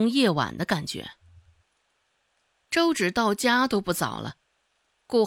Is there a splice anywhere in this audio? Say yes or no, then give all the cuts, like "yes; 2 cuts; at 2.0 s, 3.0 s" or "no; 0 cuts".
no; 0 cuts